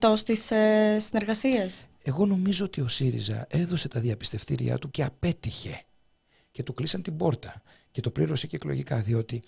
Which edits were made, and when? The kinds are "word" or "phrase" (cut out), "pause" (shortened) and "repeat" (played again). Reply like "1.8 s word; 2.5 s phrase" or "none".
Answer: 4.9 s word